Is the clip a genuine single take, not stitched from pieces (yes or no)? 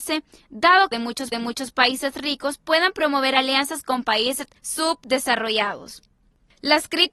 no